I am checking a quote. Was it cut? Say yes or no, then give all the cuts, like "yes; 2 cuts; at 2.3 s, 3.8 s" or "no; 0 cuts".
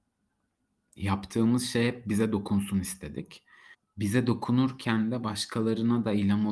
yes; 1 cut; at 3.7 s